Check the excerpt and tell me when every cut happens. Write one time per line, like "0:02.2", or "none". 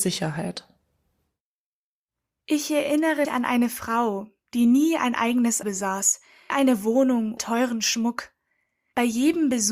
0:03.2
0:05.6
0:06.5
0:07.4